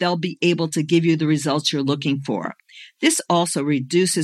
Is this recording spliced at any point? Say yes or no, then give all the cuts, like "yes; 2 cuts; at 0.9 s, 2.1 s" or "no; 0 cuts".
no; 0 cuts